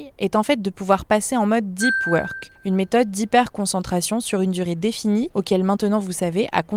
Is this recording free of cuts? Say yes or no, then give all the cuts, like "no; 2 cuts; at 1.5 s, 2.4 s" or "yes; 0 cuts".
yes; 0 cuts